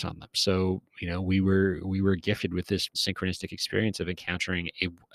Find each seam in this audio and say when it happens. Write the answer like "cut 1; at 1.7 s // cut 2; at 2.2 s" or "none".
cut 1; at 2.9 s